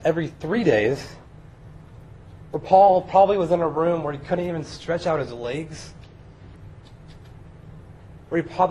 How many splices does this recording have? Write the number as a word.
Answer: one